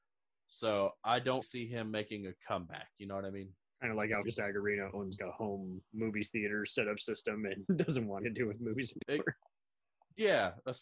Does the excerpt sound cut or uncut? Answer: cut